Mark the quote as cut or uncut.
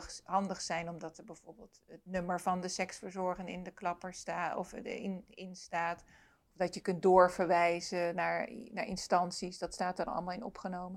uncut